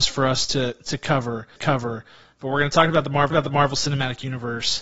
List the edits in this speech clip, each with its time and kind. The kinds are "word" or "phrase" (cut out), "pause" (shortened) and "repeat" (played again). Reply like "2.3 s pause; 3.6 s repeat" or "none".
1.6 s repeat; 3.3 s repeat